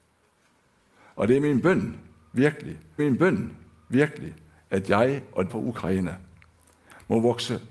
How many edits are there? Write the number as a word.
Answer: two